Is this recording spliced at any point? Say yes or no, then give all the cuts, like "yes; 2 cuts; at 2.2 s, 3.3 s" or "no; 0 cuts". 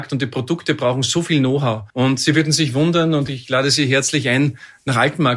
yes; 1 cut; at 1.9 s